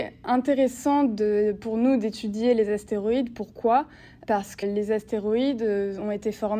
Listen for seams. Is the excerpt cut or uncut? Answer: cut